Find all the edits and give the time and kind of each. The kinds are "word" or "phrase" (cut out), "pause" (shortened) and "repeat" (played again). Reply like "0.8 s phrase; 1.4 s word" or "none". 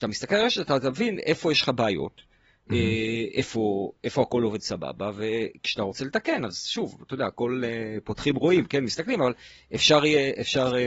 none